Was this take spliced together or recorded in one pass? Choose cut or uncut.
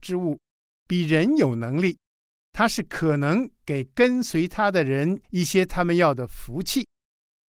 cut